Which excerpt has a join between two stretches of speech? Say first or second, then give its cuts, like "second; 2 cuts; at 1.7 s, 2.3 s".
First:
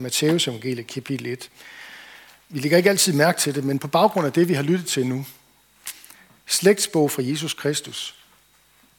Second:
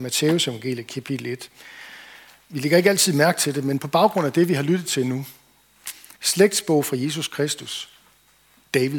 second; 1 cut; at 6.2 s